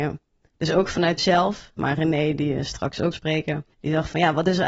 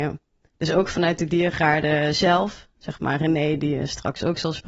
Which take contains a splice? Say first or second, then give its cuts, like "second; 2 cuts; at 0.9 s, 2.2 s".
first; 4 cuts; at 1.2 s, 1.8 s, 3.1 s, 3.7 s